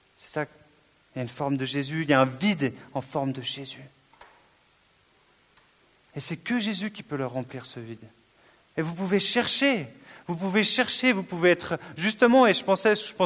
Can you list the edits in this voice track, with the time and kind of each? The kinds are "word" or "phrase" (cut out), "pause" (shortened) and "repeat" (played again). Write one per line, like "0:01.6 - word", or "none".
none

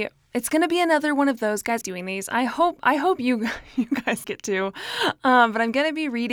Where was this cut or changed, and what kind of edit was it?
0:01.8 - phrase
0:04.2 - word

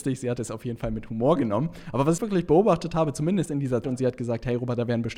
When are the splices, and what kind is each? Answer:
0:02.2 - word
0:03.5 - word
0:03.8 - word

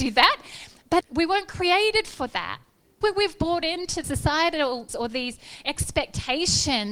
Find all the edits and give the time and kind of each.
0:01.0 - word
0:03.0 - word
0:04.0 - word
0:04.9 - word

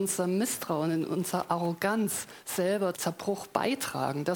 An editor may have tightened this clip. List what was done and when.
0:02.9 - word

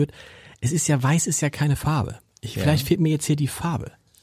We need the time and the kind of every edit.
none

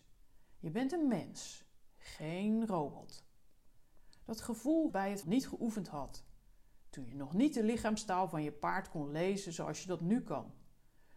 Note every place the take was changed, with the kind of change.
0:04.9 - word
0:05.2 - phrase

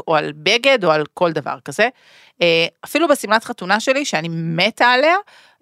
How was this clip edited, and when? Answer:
none

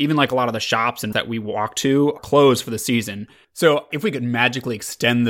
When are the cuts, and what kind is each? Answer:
0:01.1 - word
0:02.2 - word
0:03.9 - word

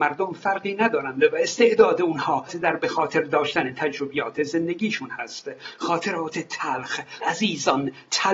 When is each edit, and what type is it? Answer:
0:02.5 - word
0:07.2 - word

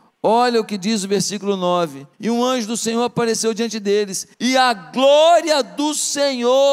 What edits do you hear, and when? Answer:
0:02.1 - pause
0:04.3 - pause

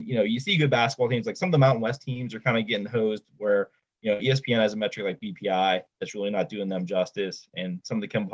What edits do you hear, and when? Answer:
none

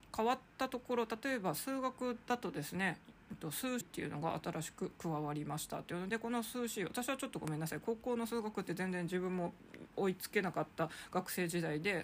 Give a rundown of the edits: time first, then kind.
0:03.8 - word

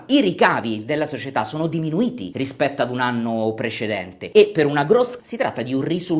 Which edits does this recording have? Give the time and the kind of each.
0:05.2 - word

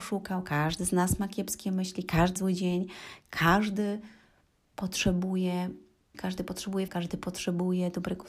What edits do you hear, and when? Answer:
0:02.4 - word
0:06.1 - word
0:06.9 - word

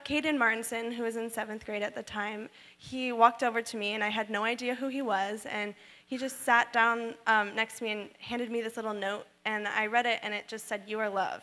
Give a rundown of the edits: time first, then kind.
none

